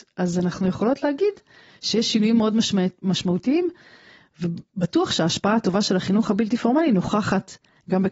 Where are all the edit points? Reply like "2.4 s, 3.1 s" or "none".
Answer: none